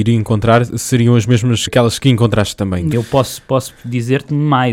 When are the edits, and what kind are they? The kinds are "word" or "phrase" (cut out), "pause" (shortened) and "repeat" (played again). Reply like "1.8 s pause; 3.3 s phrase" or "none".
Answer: 1.7 s word; 2.9 s word

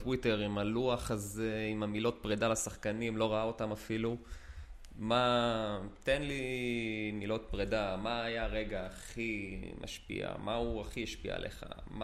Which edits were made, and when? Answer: none

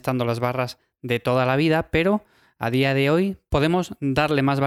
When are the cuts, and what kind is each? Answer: none

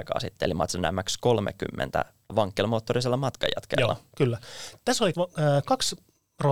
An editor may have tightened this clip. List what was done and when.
2.3 s word; 5.1 s word

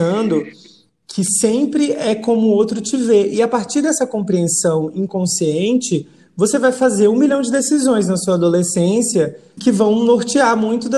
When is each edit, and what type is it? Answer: 9.6 s word

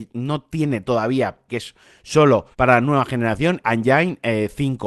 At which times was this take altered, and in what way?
1.5 s phrase; 2.5 s pause; 3.6 s phrase

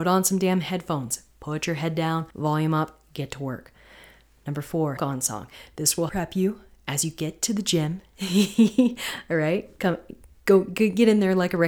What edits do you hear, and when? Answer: 2.3 s pause; 5.0 s phrase; 6.1 s word

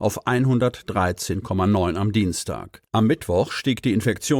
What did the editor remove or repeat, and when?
2.9 s pause

